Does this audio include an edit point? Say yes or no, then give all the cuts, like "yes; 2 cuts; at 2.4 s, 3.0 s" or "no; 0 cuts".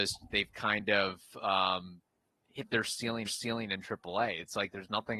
yes; 1 cut; at 3.3 s